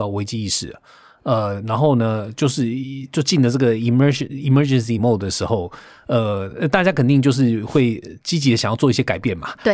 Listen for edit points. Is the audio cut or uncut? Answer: uncut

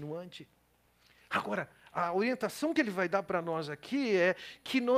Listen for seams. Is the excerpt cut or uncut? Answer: uncut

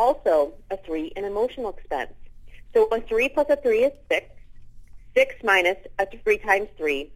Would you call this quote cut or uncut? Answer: uncut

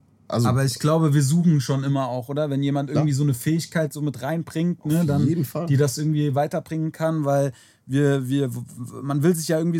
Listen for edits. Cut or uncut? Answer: uncut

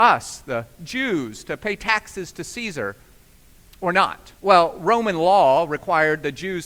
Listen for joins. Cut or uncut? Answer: cut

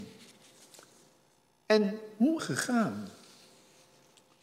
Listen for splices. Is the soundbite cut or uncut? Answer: cut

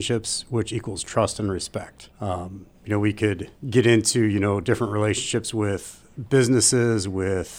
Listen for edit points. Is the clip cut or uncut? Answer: cut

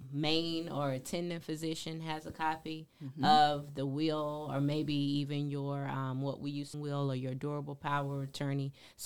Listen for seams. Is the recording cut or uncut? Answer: cut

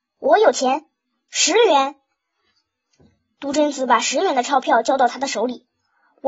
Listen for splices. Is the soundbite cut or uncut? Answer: uncut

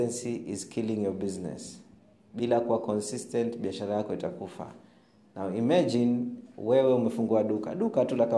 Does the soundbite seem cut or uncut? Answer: uncut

